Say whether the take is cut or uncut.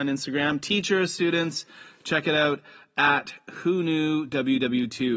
uncut